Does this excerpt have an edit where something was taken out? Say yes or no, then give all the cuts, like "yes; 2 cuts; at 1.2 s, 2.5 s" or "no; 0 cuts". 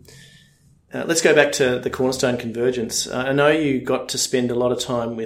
no; 0 cuts